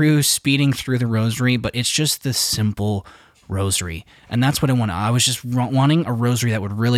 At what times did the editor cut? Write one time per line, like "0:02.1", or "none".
none